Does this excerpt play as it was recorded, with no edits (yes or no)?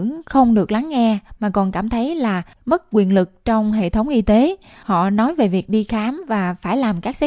yes